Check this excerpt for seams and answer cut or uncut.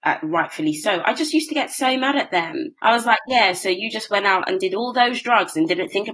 cut